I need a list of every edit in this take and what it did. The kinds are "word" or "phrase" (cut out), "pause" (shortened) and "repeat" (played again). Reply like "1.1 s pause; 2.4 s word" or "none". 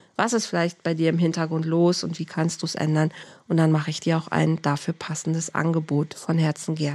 none